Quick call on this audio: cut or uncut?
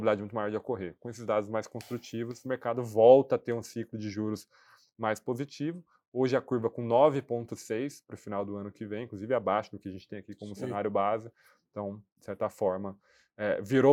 uncut